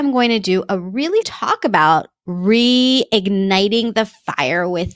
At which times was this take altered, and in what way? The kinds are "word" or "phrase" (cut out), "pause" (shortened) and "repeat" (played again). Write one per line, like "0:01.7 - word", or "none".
0:01.2 - phrase

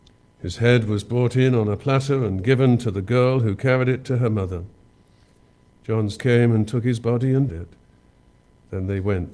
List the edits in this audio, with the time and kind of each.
0:06.2 - word
0:07.5 - word

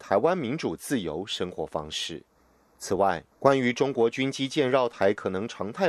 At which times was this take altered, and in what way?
0:02.3 - pause
0:03.3 - pause

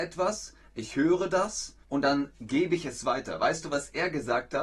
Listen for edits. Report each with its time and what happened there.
0:01.8 - pause

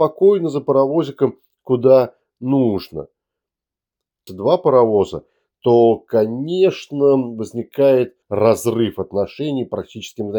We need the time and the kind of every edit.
0:04.3 - phrase
0:08.2 - pause

